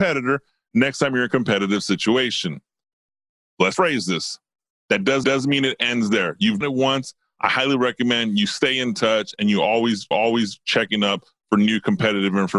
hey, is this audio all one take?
no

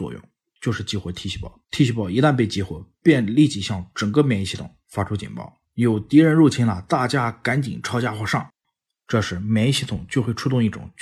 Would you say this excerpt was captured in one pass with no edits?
no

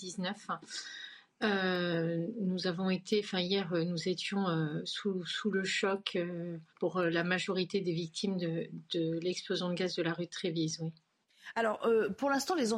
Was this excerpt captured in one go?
no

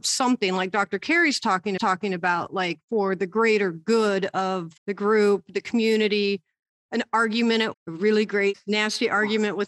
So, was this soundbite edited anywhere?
yes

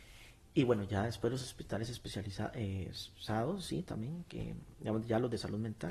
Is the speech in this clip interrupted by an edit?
no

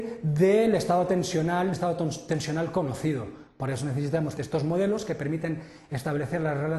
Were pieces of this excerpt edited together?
yes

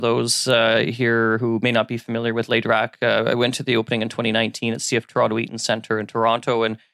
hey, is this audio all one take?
yes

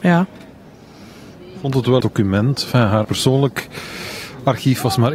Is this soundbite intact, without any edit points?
no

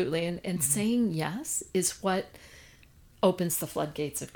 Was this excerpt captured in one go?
yes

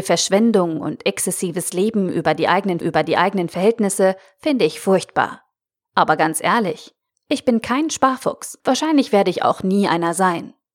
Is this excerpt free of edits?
no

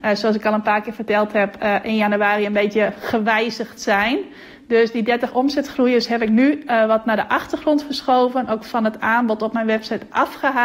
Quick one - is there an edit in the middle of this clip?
no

